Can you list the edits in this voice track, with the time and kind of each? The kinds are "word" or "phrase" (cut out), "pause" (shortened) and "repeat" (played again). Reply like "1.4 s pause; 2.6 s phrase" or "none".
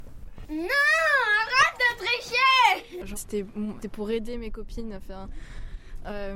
3.2 s phrase; 3.8 s phrase